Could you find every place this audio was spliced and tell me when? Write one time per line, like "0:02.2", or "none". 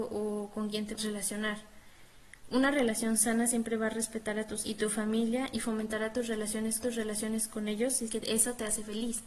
0:01.0
0:04.6
0:06.8
0:08.1